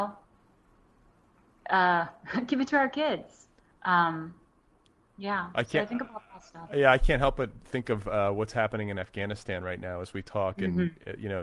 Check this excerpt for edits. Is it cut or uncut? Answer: cut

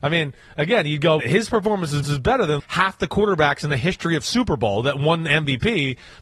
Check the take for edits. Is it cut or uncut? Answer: cut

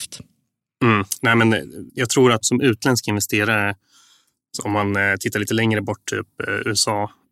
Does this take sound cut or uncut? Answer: cut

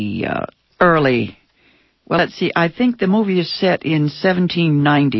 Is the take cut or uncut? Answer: uncut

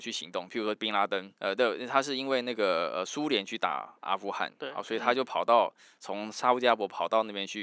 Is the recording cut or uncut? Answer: uncut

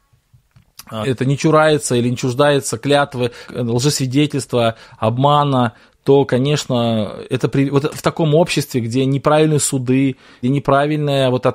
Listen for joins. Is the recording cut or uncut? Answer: cut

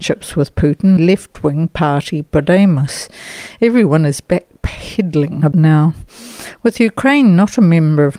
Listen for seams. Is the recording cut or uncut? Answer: cut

